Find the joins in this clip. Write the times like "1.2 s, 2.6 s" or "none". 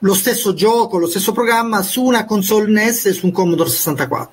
none